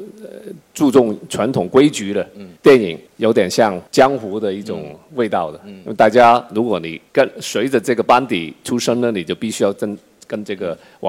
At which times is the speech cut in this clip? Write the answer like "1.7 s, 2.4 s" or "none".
2.6 s, 3.1 s, 3.9 s, 7.1 s